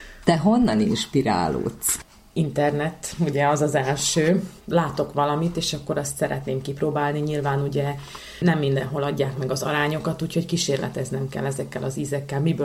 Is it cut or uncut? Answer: uncut